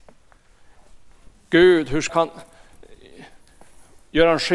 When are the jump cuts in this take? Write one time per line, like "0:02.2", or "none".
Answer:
0:01.3
0:02.1